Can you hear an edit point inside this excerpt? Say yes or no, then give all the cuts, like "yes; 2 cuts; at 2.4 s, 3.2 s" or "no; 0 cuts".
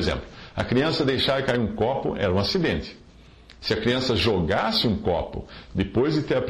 no; 0 cuts